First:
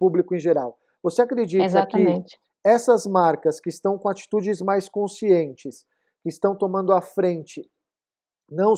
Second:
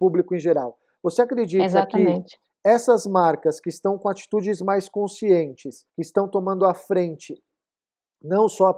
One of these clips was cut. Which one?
second; 1 cut; at 5.9 s

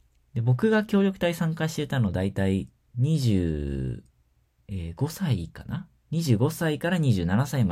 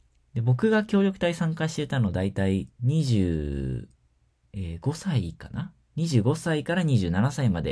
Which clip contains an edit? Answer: second; 1 cut; at 2.7 s

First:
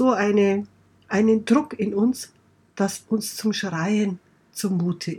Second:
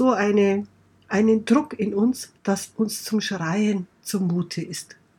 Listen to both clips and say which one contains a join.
second; 2 cuts; at 2.4 s, 3.9 s

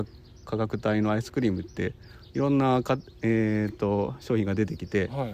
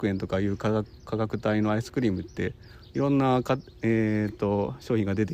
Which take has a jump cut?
second; 1 cut; at 1.0 s

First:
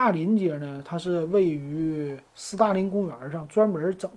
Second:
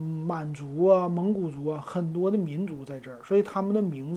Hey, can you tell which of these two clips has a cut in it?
first; 1 cut; at 2.3 s

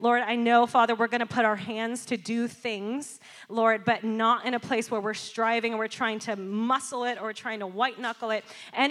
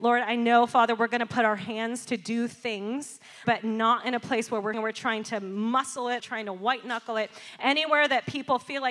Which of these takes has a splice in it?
second; 3 cuts; at 3.4 s, 4.7 s, 6.2 s

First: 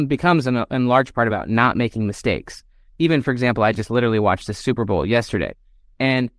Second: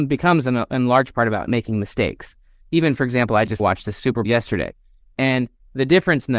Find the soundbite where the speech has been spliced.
second; 3 cuts; at 1.5 s, 3.6 s, 4.2 s

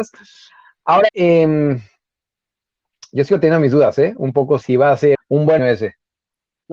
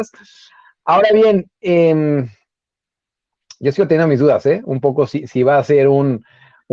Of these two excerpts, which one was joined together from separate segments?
first; 4 cuts; at 1.1 s, 4.6 s, 5.1 s, 5.6 s

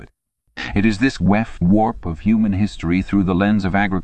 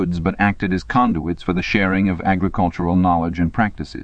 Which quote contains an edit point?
first; 2 cuts; at 1.2 s, 1.6 s

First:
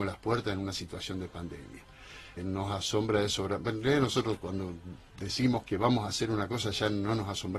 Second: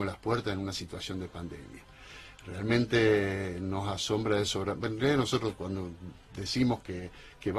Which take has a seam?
first; 2 cuts; at 2.4 s, 5.6 s

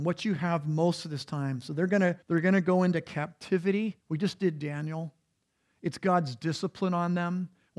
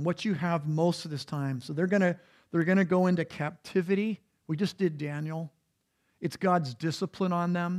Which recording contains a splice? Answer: first; 2 cuts; at 2.2 s, 4.0 s

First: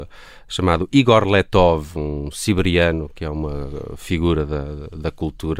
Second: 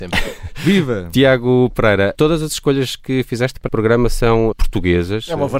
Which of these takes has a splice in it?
second; 3 cuts; at 2.2 s, 3.7 s, 4.5 s

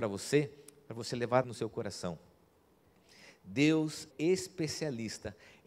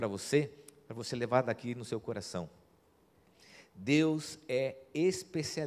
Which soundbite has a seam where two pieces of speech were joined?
first; 2 cuts; at 1.4 s, 4.1 s

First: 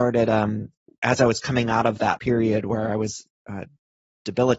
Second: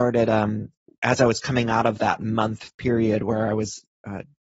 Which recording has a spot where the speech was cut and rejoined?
first; 1 cut; at 2.2 s

